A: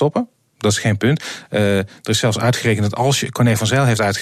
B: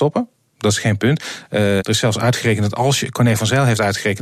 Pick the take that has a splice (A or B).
B